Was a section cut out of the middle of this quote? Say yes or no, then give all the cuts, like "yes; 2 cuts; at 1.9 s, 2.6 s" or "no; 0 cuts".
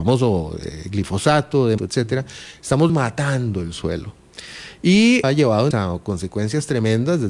yes; 4 cuts; at 1.8 s, 2.9 s, 5.2 s, 5.7 s